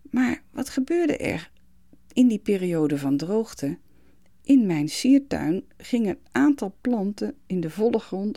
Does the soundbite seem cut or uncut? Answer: uncut